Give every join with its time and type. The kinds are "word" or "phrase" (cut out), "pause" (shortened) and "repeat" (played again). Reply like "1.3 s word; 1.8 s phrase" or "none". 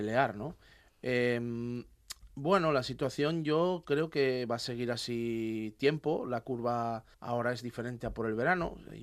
7.1 s pause

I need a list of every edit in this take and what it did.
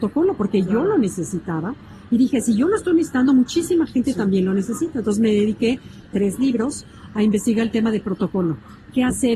none

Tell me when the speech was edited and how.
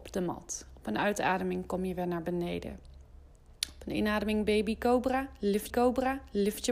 5.7 s repeat

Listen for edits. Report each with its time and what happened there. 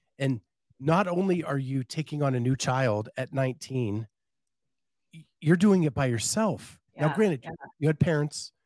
6.9 s pause

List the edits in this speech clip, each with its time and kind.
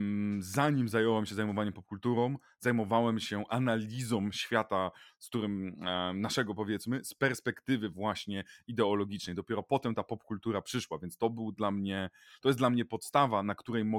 none

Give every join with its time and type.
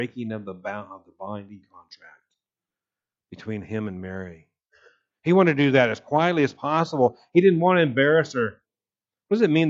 none

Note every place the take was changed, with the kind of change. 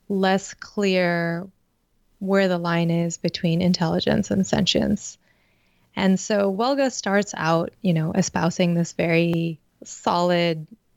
none

